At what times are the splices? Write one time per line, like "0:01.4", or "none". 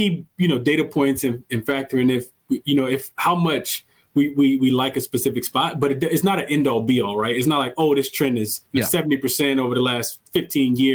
0:08.7